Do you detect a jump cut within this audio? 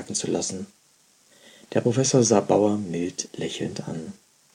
no; 0 cuts

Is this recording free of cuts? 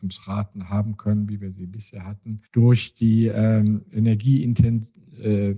no; 1 cut; at 2.5 s

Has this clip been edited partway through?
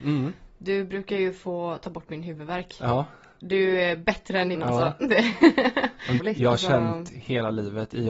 yes; 2 cuts; at 4.5 s, 6.2 s

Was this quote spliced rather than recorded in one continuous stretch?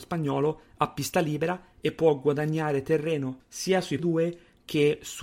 yes; 1 cut; at 4.0 s

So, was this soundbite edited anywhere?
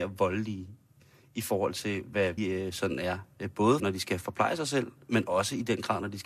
yes; 2 cuts; at 2.4 s, 3.8 s

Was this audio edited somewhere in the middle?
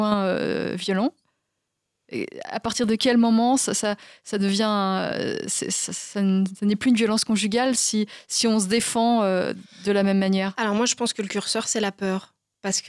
no; 0 cuts

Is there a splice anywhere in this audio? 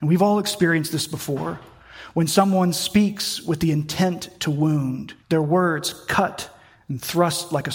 yes; 1 cut; at 5.2 s

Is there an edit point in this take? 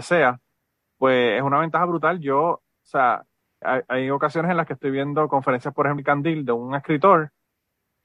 yes; 2 cuts; at 3.6 s, 6.0 s

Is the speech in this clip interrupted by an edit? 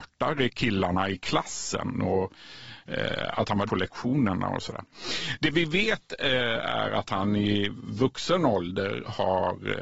yes; 1 cut; at 3.7 s

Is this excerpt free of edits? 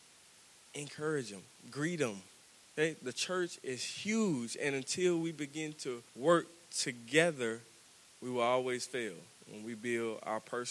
no; 3 cuts; at 2.4 s, 6.1 s, 7.9 s

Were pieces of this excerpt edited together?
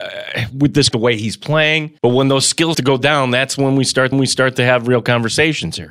yes; 4 cuts; at 0.9 s, 2.0 s, 2.7 s, 4.1 s

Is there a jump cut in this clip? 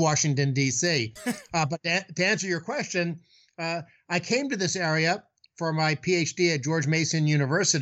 no; 0 cuts

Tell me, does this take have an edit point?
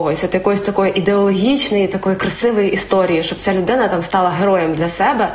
no; 0 cuts

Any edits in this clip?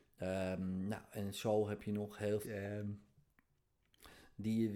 yes; 1 cut; at 2.4 s

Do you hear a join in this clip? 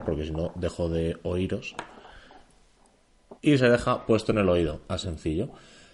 yes; 2 cuts; at 3.4 s, 5.0 s

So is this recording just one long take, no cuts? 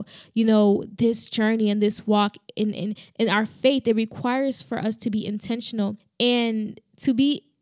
yes; 0 cuts

